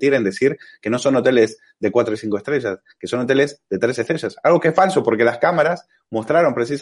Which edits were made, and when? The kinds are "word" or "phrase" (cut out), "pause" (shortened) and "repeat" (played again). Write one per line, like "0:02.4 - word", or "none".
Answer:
none